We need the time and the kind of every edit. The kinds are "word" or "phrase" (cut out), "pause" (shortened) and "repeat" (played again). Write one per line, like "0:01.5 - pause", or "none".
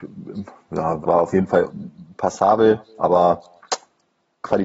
0:01.0 - phrase